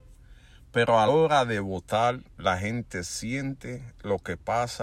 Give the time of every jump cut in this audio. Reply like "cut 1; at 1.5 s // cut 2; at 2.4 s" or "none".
cut 1; at 1.1 s